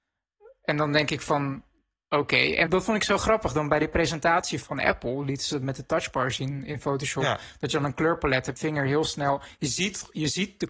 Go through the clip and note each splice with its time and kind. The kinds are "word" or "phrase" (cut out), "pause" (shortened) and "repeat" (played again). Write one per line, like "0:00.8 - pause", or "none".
0:02.7 - word
0:04.6 - word
0:08.6 - phrase